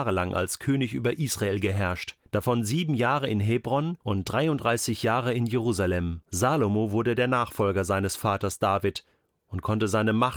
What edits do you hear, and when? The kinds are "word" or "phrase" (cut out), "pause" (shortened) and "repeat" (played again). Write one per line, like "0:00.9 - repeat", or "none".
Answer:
0:02.3 - pause
0:04.0 - pause
0:06.2 - pause